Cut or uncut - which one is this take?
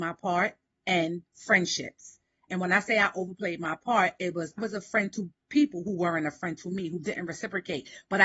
cut